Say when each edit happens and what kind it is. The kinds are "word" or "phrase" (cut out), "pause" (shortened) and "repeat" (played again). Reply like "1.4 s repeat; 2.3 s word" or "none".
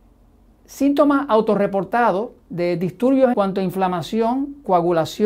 2.4 s pause; 3.3 s phrase

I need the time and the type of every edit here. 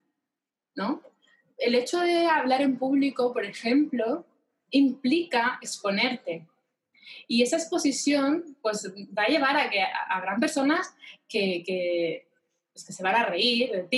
none

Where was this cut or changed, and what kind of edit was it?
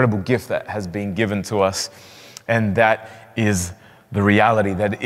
none

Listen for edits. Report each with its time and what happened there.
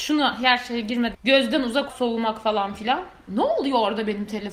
1.1 s word; 1.9 s word

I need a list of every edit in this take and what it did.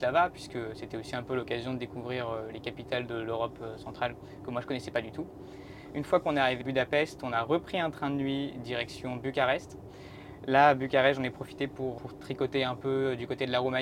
6.6 s word; 12.0 s word

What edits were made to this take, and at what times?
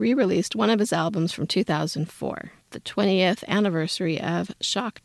2.7 s pause

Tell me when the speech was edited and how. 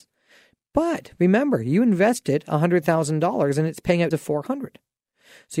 4.1 s word

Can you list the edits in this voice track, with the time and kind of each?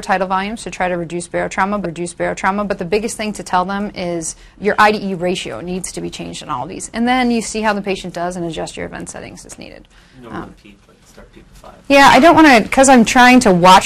1.8 s repeat; 4.6 s word; 11.8 s pause

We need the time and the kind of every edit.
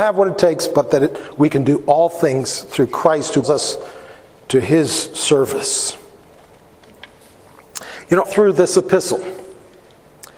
3.4 s word; 8.2 s word

